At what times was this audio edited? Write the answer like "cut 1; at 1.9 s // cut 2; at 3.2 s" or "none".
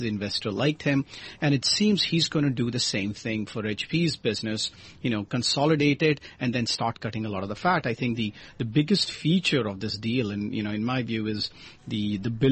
none